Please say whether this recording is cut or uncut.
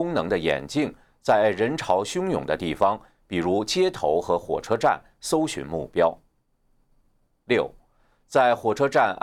uncut